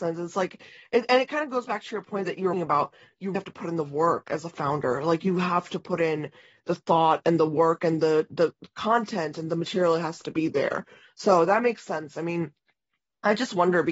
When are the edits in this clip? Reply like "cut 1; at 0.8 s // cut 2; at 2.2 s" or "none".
cut 1; at 2.5 s // cut 2; at 3.3 s

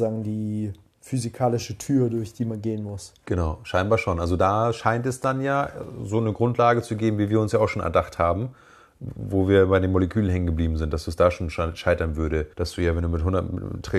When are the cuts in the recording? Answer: cut 1; at 12.5 s

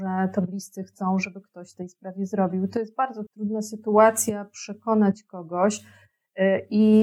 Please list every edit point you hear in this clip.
cut 1; at 1.7 s // cut 2; at 3.3 s

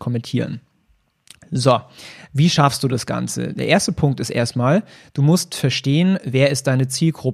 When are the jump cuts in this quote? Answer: none

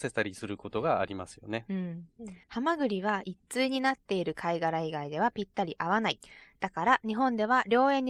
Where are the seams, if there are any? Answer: cut 1; at 2.4 s

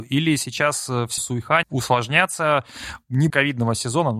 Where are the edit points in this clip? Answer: cut 1; at 1.2 s // cut 2; at 1.6 s // cut 3; at 3.3 s

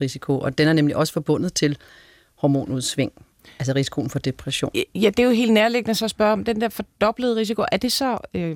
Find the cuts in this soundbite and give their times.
none

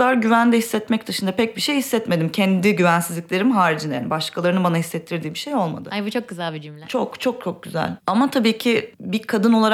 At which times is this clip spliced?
none

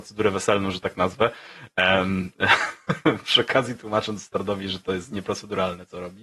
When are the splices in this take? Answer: none

